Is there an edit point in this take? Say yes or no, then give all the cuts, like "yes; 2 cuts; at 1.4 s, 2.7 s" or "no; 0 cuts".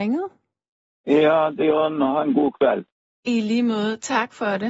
yes; 1 cut; at 1.6 s